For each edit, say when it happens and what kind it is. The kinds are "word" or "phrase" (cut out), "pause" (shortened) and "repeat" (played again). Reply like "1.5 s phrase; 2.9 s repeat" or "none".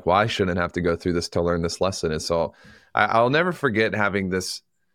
none